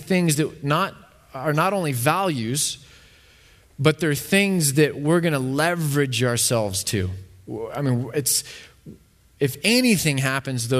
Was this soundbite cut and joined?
no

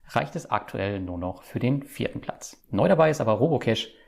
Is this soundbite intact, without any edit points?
no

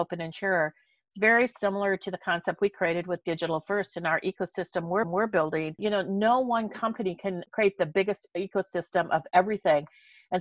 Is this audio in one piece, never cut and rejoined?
no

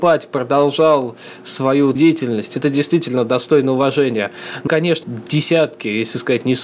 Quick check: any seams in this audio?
yes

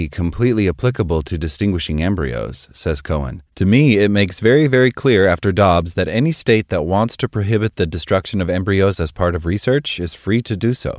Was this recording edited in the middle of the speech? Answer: yes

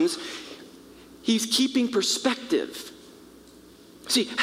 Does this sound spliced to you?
no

